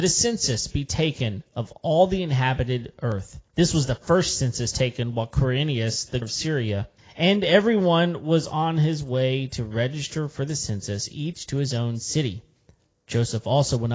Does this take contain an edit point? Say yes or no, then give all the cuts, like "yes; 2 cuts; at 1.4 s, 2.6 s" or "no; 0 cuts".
yes; 3 cuts; at 3.5 s, 6.2 s, 7.0 s